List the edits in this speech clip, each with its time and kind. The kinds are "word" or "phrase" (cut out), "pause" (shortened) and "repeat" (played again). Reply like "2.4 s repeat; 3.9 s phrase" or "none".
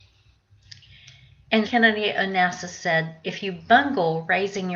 1.6 s word